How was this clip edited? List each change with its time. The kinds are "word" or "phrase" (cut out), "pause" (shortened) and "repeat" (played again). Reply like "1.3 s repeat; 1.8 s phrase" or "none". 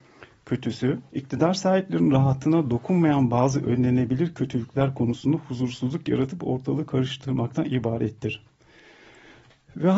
1.1 s pause